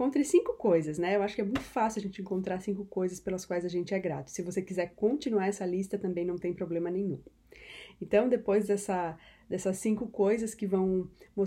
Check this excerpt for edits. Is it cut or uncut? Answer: uncut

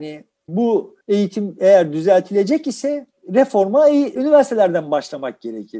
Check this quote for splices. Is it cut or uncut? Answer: cut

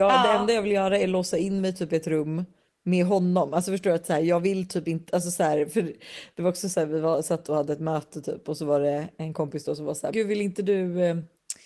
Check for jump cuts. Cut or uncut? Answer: cut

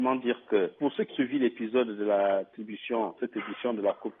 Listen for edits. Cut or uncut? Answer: cut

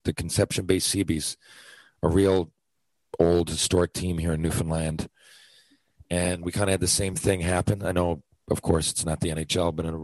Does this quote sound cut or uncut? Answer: uncut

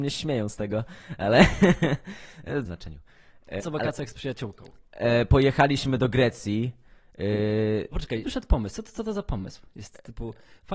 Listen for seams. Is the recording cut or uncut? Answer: cut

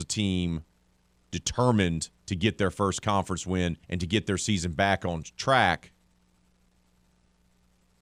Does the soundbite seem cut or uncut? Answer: cut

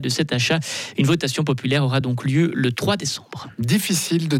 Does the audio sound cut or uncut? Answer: uncut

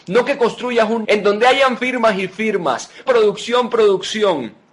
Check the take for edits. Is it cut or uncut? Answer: cut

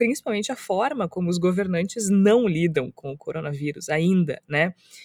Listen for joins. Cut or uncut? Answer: uncut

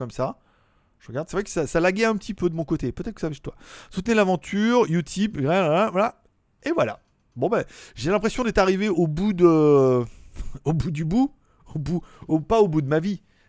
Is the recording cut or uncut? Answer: uncut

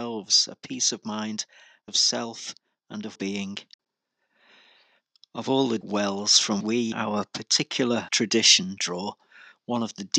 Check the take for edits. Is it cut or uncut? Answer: cut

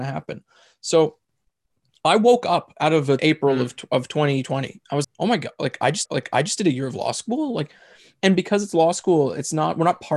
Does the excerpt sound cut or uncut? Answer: cut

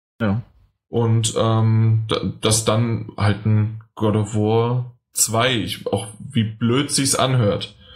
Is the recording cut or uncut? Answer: uncut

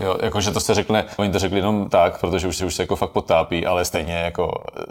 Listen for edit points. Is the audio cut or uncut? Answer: cut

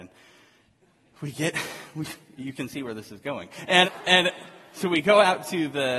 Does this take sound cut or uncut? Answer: cut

